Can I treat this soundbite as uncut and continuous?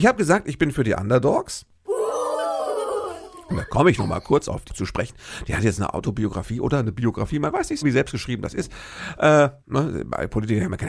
no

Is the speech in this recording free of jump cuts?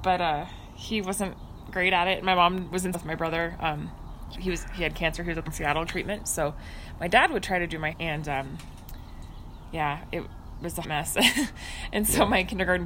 no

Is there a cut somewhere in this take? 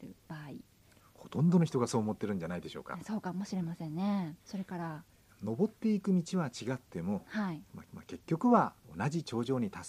yes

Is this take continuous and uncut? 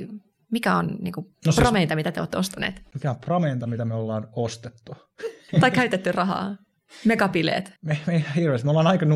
no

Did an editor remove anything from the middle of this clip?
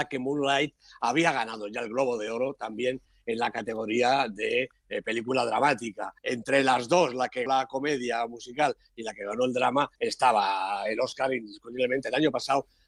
yes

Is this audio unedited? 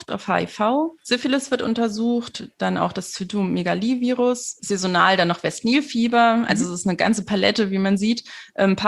no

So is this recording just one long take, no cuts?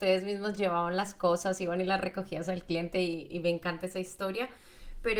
yes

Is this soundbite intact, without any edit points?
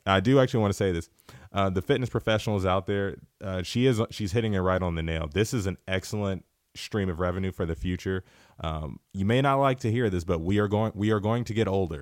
yes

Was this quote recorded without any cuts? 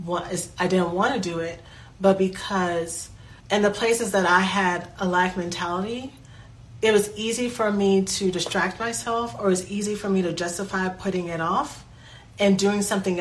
yes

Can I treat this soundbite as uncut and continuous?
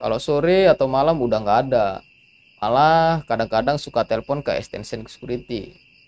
yes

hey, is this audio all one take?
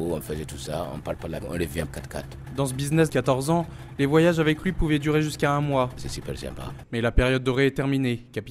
no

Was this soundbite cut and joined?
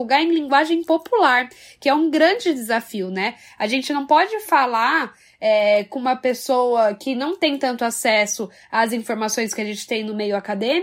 no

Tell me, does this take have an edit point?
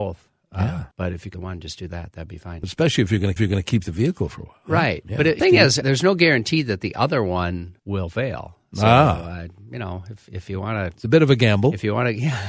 yes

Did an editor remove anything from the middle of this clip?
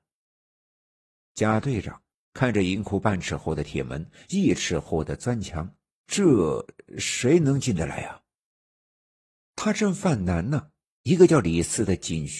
no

